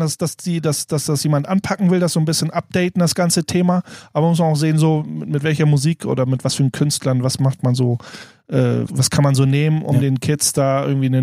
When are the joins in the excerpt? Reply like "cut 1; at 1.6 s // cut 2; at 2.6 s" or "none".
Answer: cut 1; at 8.9 s